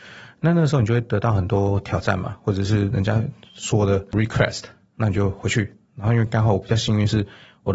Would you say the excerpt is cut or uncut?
uncut